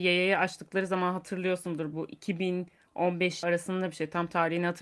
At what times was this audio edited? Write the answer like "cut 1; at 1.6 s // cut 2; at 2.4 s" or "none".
cut 1; at 1.9 s // cut 2; at 3.4 s